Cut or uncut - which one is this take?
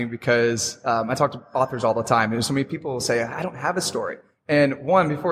uncut